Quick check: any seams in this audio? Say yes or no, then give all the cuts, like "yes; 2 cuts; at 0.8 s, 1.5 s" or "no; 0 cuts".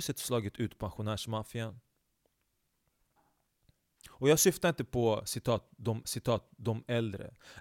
yes; 1 cut; at 6.0 s